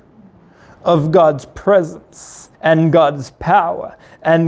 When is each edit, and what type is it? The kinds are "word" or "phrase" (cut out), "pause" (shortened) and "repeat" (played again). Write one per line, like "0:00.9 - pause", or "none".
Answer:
0:02.5 - pause